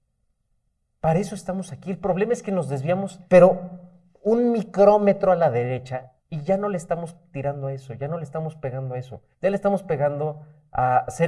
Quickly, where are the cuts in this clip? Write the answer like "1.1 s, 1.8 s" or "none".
3.3 s, 6.2 s, 9.3 s

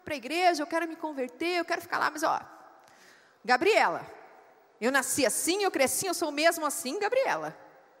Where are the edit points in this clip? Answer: 6.0 s

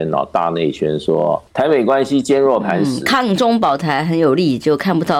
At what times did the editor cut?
1.5 s

